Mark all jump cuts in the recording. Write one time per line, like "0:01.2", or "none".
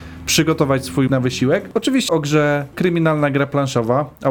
0:01.1
0:02.1
0:02.7